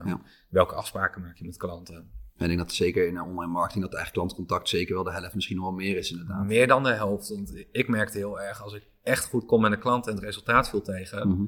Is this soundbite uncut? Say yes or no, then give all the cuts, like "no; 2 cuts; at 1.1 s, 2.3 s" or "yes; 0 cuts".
no; 1 cut; at 2.3 s